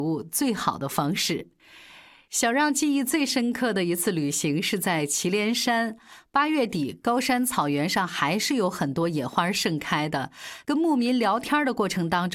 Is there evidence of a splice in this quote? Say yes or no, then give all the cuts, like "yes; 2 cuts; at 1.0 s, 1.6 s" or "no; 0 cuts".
no; 0 cuts